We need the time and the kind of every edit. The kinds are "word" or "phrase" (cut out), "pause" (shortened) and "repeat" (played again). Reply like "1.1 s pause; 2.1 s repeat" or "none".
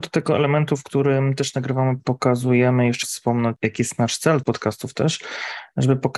2.0 s word; 3.0 s word; 4.4 s word